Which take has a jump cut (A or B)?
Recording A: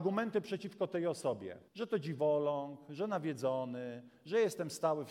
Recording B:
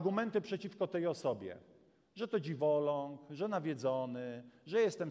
A